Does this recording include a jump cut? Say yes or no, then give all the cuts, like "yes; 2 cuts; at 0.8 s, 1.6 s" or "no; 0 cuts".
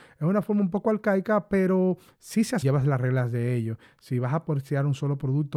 yes; 1 cut; at 2.6 s